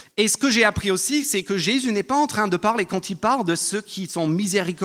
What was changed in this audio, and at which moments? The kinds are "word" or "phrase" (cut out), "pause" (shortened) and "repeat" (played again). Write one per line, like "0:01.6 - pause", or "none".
none